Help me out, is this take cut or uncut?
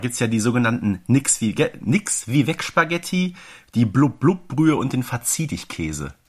uncut